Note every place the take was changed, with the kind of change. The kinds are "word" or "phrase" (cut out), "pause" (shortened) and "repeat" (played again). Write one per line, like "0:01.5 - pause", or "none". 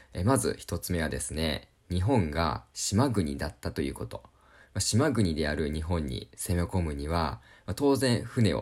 none